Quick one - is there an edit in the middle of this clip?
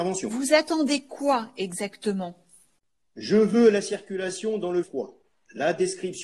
yes; 1 cut; at 4.8 s

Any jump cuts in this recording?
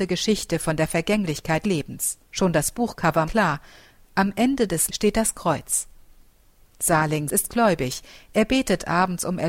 yes; 5 cuts; at 1.6 s, 2.2 s, 3.3 s, 4.9 s, 7.3 s

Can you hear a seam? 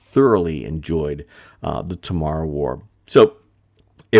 no; 0 cuts

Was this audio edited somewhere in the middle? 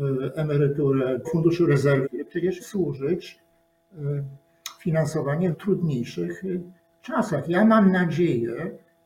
yes; 4 cuts; at 1.2 s, 2.0 s, 2.6 s, 5.5 s

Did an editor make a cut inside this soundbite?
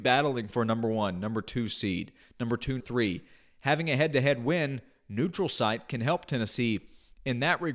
yes; 1 cut; at 2.8 s

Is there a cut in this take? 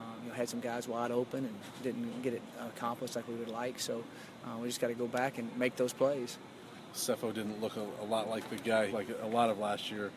yes; 1 cut; at 8.9 s

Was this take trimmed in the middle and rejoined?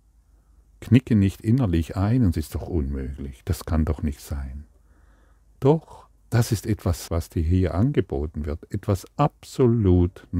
yes; 3 cuts; at 2.3 s, 6.2 s, 7.1 s

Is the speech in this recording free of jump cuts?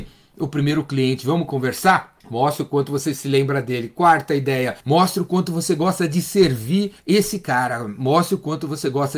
no; 3 cuts; at 2.2 s, 4.8 s, 7.0 s

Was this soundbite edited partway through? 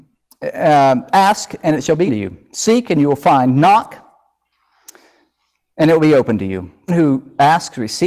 yes; 2 cuts; at 2.1 s, 6.9 s

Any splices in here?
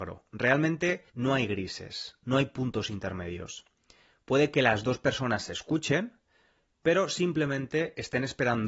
yes; 1 cut; at 1.1 s

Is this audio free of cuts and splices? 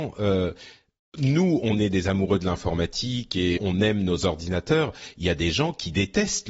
no; 1 cut; at 3.6 s

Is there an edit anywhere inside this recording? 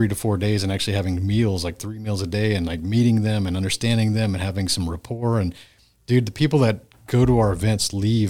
no; 0 cuts

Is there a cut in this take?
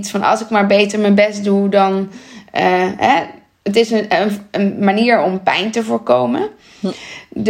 no; 0 cuts

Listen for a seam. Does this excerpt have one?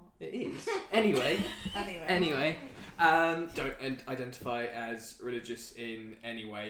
yes; 1 cut; at 3.5 s

